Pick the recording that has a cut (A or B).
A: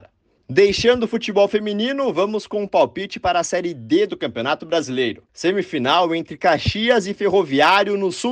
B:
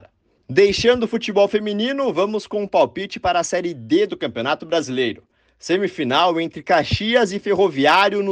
A